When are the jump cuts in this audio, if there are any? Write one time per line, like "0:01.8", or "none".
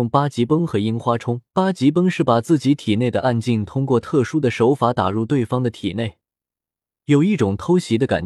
0:01.5

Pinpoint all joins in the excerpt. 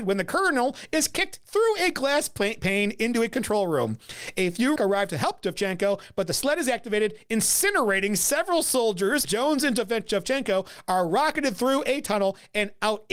0:04.8
0:09.2

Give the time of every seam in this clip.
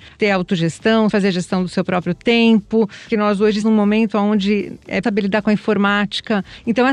0:01.1
0:03.1
0:03.6
0:05.0

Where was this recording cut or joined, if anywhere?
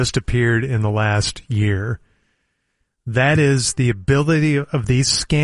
none

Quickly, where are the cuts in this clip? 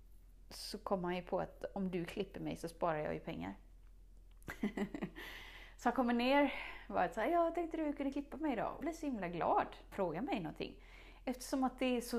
0:08.8
0:09.9

